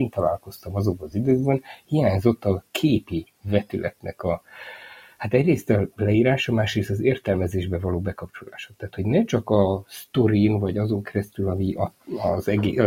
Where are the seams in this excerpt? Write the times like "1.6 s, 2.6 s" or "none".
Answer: none